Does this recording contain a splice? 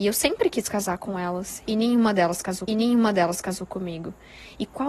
yes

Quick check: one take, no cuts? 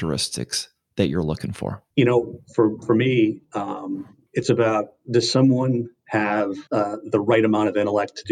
no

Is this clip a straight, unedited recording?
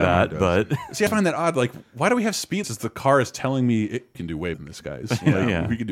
no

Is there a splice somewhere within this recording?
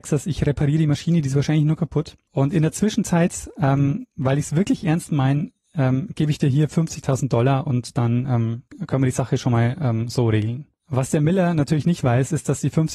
no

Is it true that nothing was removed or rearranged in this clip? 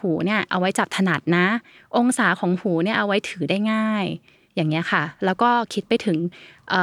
yes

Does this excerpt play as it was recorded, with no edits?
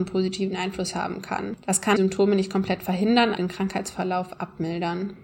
no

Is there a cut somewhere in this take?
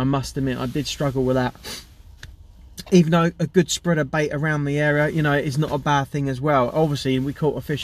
no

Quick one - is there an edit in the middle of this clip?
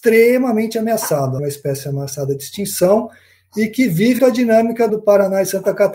yes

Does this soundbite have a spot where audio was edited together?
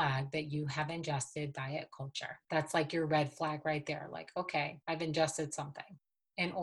yes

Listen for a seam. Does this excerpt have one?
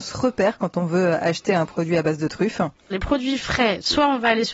no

